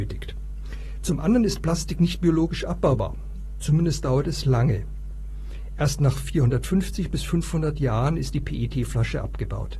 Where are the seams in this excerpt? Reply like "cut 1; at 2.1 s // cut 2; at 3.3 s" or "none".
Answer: none